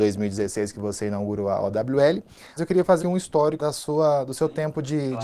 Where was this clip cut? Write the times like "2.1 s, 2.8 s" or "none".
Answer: 2.6 s, 3.0 s, 3.6 s

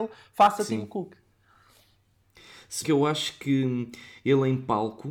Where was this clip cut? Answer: 2.8 s

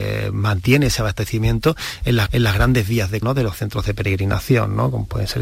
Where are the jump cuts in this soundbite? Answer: 2.3 s, 3.2 s

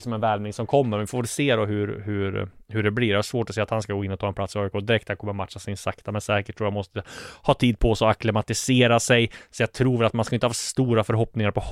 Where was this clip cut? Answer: none

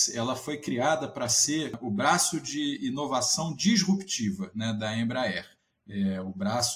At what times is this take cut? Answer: 5.6 s

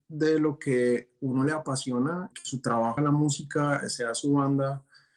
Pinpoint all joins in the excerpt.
2.3 s, 3.0 s

